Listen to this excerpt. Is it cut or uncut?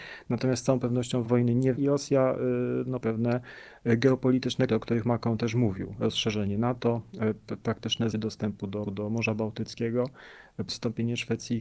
cut